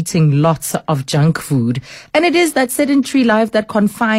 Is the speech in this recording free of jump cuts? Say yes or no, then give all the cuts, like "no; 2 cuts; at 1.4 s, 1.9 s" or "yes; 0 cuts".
yes; 0 cuts